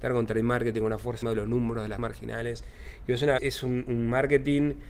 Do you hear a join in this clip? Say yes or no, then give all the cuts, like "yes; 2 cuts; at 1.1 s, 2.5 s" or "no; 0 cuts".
yes; 3 cuts; at 1.2 s, 2.0 s, 3.4 s